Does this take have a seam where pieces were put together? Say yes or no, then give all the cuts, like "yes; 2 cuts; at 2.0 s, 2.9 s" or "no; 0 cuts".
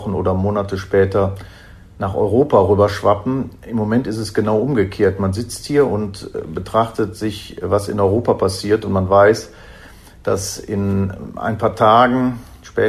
no; 0 cuts